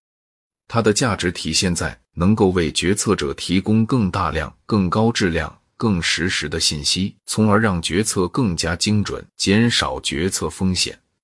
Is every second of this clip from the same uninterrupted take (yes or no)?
no